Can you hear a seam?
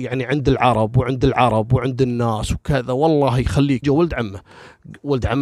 yes; 2 cuts; at 1.2 s, 3.8 s

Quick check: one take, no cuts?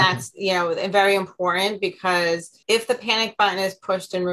no; 1 cut; at 2.6 s

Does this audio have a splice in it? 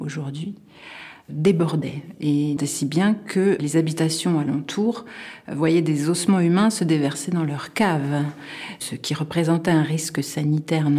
yes; 1 cut; at 2.6 s

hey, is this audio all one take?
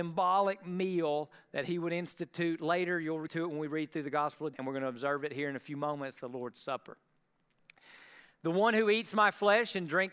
no; 2 cuts; at 3.3 s, 4.5 s

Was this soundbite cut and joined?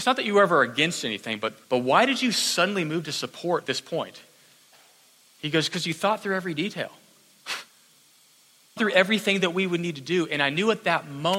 yes; 4 cuts; at 1.6 s, 3.7 s, 7.7 s, 8.8 s

